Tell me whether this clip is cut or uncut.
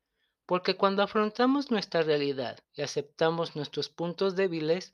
cut